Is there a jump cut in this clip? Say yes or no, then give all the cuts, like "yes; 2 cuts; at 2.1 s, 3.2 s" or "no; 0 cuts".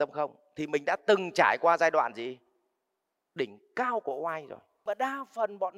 no; 0 cuts